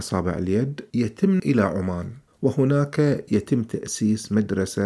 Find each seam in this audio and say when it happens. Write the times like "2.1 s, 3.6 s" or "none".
1.4 s

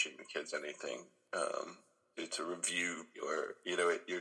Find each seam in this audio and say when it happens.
2.1 s, 3.1 s

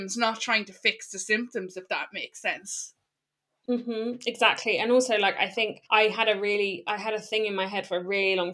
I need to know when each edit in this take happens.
5.9 s

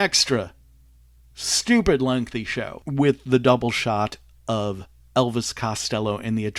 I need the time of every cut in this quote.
none

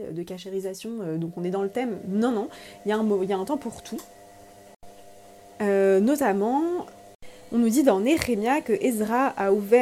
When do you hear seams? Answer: none

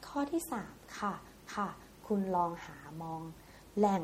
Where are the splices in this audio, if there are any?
1.5 s

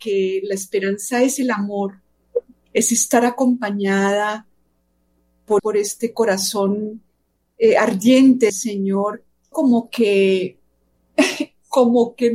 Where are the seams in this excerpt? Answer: 2.5 s, 5.6 s, 8.5 s, 9.5 s

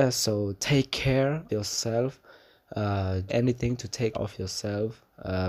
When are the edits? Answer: 1.5 s, 3.3 s, 4.1 s

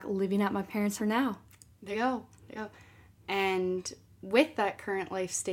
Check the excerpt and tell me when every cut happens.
1.0 s, 1.9 s, 2.6 s

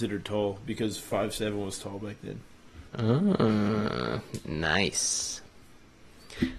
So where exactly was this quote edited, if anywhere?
2.9 s

